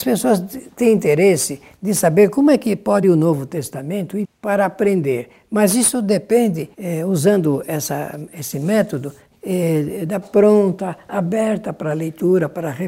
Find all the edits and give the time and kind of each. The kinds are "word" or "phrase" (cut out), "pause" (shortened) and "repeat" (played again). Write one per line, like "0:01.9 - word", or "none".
0:03.0 - word
0:04.2 - word
0:06.7 - pause
0:09.3 - word
0:10.2 - phrase